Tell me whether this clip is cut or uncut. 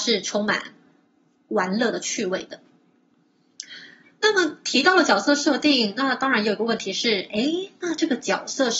uncut